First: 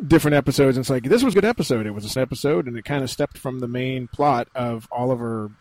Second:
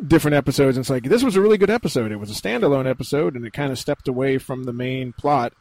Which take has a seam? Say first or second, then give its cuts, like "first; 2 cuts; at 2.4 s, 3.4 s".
first; 3 cuts; at 1.3 s, 2.2 s, 3.3 s